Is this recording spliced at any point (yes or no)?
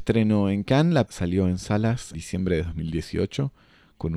yes